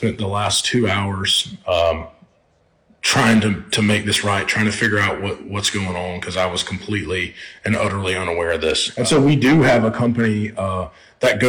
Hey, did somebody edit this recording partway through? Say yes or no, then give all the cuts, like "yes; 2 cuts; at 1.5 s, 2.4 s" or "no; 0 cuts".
no; 0 cuts